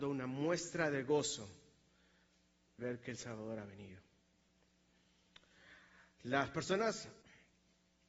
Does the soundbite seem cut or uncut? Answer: cut